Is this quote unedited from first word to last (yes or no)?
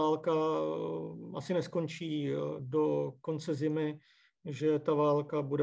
yes